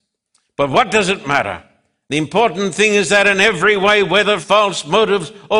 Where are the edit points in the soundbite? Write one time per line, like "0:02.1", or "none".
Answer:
0:04.4